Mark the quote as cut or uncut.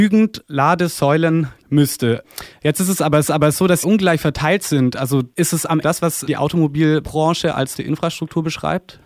cut